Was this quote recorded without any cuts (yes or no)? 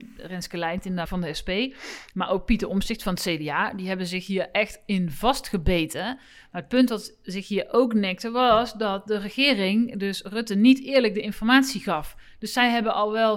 no